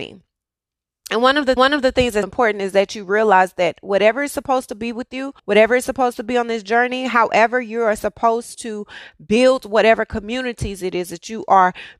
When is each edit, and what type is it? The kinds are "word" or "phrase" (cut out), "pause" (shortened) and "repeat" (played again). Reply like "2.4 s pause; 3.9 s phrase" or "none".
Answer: 1.6 s repeat; 2.2 s word; 5.4 s pause